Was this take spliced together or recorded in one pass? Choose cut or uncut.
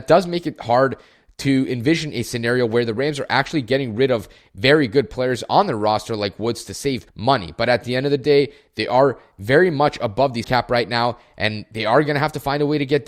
cut